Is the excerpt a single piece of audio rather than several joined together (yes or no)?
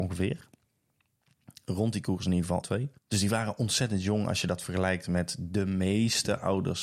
no